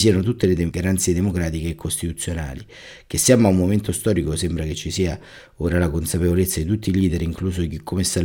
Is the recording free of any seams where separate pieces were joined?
yes; 0 cuts

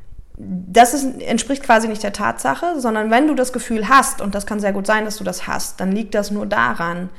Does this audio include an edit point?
no; 0 cuts

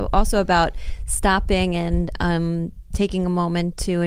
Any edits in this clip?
no; 0 cuts

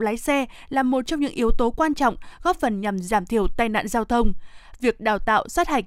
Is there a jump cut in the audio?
no; 0 cuts

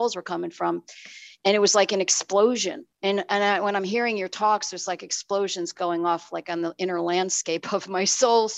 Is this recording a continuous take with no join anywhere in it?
no; 1 cut; at 2.9 s

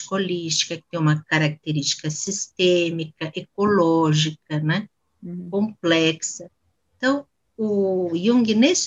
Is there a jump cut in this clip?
no; 0 cuts

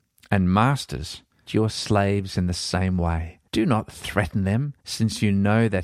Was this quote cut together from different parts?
yes; 3 cuts; at 1.5 s, 3.5 s, 4.8 s

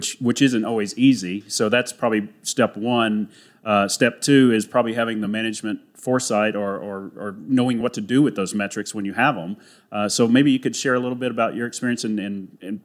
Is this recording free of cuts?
yes; 0 cuts

